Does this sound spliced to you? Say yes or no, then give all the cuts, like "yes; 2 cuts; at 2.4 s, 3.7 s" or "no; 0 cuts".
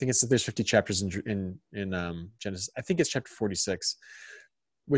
no; 0 cuts